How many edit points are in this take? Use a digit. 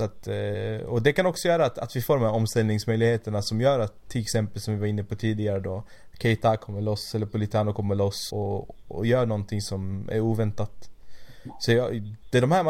1